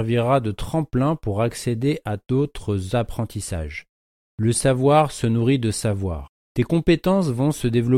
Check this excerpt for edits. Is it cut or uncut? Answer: uncut